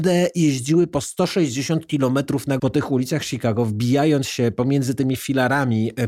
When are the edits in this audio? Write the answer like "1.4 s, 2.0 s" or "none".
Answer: 2.6 s

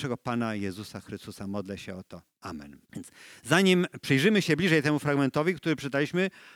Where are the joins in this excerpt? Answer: 2.8 s

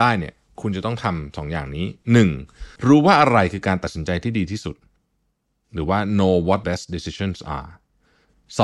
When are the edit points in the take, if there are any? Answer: 2.8 s, 6.6 s

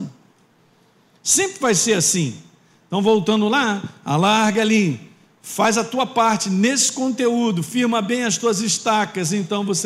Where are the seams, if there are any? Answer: none

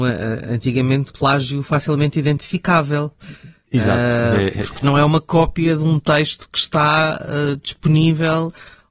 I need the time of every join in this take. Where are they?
1.1 s

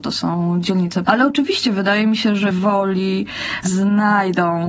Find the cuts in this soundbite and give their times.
1.1 s, 2.5 s

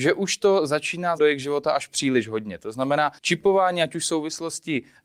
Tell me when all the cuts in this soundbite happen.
1.2 s, 3.2 s

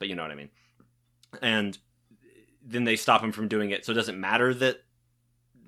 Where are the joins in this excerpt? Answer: none

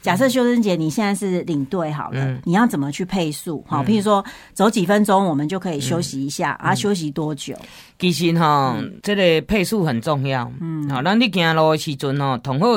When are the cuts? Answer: 9.0 s

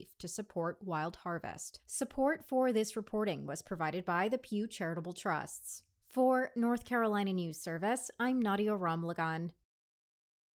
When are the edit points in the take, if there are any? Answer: none

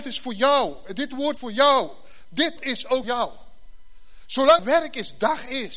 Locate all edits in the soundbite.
1.4 s, 2.6 s, 3.0 s, 4.6 s

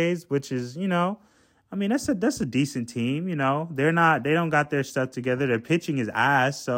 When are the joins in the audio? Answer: none

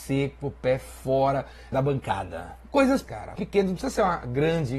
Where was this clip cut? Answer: 1.7 s, 3.0 s, 3.4 s

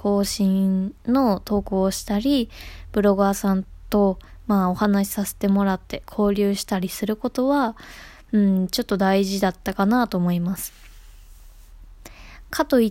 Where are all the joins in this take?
1.0 s

